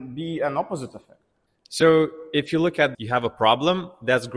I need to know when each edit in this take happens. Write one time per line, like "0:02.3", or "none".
0:02.9